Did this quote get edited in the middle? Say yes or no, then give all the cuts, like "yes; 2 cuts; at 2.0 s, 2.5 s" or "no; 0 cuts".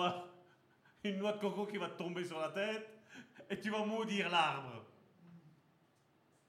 no; 0 cuts